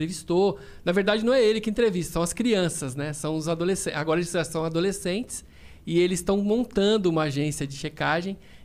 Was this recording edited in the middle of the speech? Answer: no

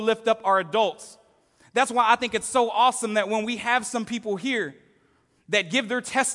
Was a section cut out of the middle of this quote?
no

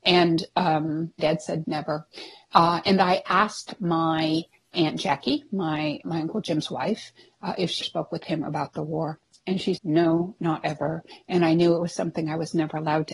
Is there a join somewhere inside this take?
yes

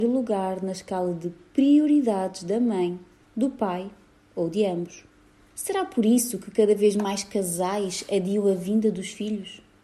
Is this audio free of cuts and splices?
yes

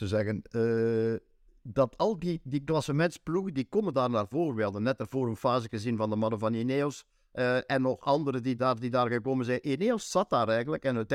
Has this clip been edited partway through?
no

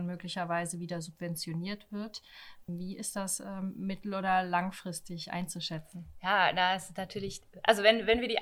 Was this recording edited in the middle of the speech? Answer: no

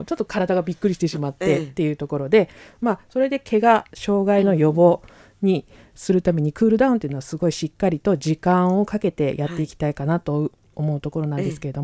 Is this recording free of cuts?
yes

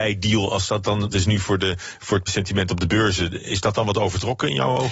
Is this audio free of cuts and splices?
no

